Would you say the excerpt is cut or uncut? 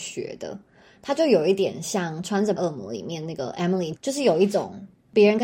cut